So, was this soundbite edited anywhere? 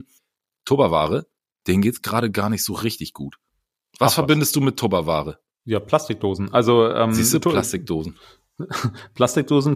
no; 0 cuts

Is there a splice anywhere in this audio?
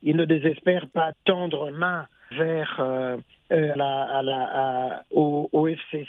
yes; 5 cuts; at 1.1 s, 1.7 s, 2.3 s, 3.7 s, 5.0 s

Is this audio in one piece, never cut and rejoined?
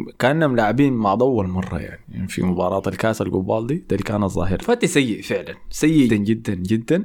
no; 4 cuts; at 1.2 s, 2.0 s, 4.6 s, 6.1 s

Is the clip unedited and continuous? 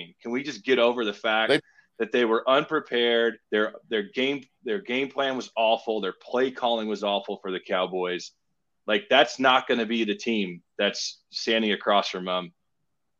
no; 1 cut; at 3.4 s

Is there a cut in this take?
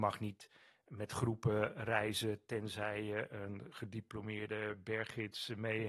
no; 0 cuts

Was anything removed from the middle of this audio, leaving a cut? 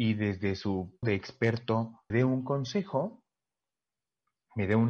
yes; 2 cuts; at 1.0 s, 2.1 s

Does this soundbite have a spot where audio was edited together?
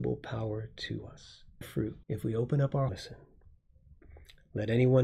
yes; 3 cuts; at 1.6 s, 2.0 s, 2.9 s

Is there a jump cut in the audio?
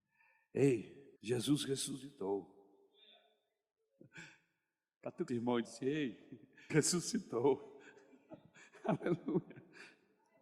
yes; 4 cuts; at 1.2 s, 5.3 s, 5.6 s, 6.7 s

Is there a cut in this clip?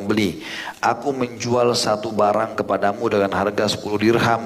no; 0 cuts

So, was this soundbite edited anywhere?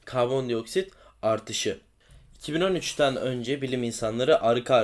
no; 0 cuts

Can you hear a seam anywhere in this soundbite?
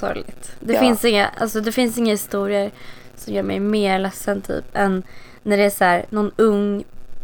yes; 1 cut; at 5.4 s

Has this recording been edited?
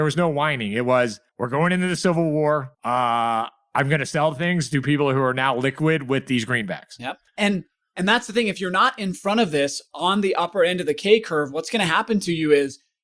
yes; 3 cuts; at 1.3 s, 2.7 s, 7.3 s

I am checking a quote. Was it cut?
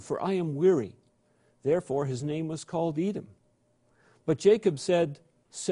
no; 0 cuts

